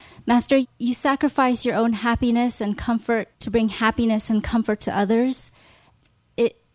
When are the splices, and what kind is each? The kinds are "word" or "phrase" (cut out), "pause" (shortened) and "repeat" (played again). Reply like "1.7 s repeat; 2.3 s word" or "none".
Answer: 3.3 s pause